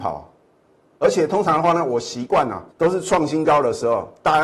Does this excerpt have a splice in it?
yes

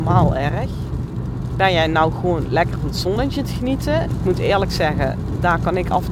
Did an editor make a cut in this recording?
no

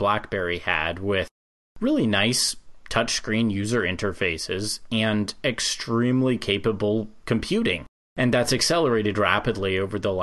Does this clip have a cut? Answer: no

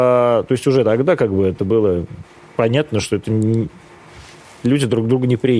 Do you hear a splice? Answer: no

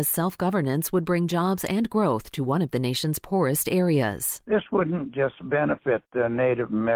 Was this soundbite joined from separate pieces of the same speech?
no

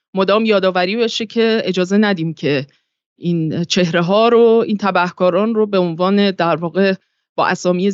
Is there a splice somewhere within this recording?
no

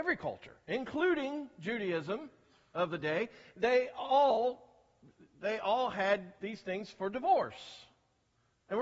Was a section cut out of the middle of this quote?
no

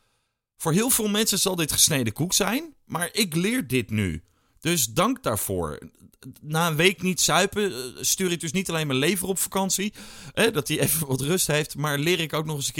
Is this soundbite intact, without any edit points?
yes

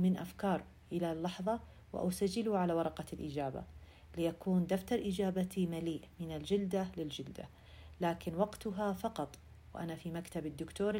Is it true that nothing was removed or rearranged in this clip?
yes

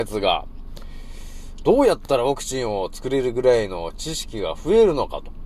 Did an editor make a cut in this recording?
no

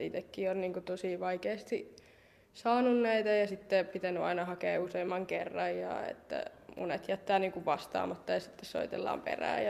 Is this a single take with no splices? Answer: yes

